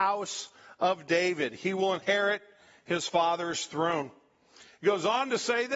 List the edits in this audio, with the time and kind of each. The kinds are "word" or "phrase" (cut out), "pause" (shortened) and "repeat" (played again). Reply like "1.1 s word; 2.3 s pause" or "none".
none